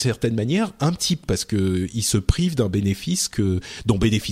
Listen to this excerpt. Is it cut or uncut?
cut